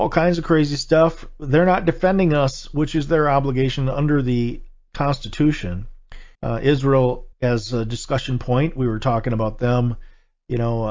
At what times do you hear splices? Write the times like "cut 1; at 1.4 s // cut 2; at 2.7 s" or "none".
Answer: cut 1; at 6.3 s // cut 2; at 7.3 s